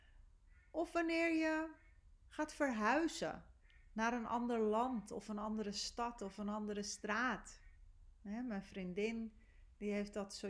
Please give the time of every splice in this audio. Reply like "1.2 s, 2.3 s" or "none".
none